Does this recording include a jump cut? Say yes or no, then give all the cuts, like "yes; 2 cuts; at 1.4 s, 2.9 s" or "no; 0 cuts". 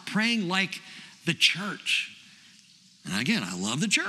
no; 0 cuts